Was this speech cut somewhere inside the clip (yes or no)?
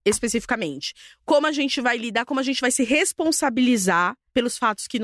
no